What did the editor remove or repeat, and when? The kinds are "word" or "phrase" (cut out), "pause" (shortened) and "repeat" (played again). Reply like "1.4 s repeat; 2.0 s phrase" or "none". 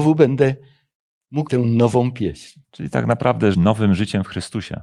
1.5 s word; 2.6 s pause; 3.5 s word